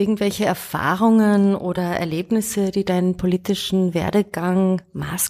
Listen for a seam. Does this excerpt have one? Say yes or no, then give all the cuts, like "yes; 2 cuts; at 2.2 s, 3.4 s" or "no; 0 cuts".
no; 0 cuts